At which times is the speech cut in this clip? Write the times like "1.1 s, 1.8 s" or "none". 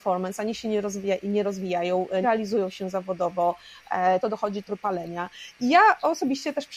2.2 s, 4.2 s, 4.7 s

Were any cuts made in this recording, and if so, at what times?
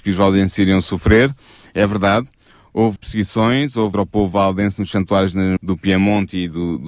3.0 s, 3.9 s, 4.9 s, 5.6 s

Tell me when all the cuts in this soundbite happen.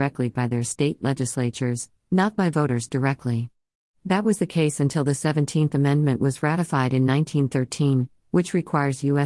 none

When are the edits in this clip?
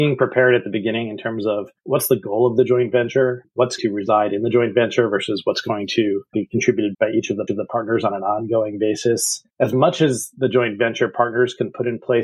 1.8 s, 3.8 s, 6.3 s, 6.9 s, 7.5 s, 9.5 s

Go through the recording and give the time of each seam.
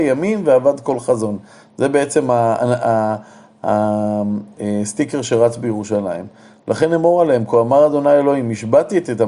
none

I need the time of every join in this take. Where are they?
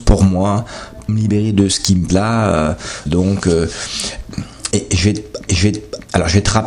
1.1 s, 2.1 s, 3.1 s, 4.7 s, 5.5 s

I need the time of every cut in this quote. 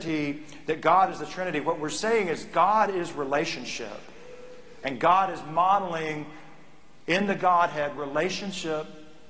none

